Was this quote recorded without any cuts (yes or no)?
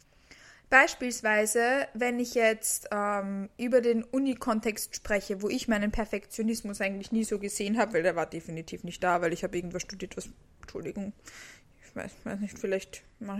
yes